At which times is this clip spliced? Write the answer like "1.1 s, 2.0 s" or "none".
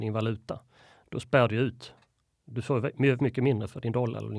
3.2 s